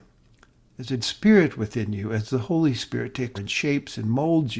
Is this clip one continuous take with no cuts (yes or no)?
no